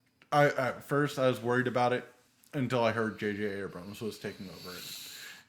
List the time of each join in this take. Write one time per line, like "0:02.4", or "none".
0:02.3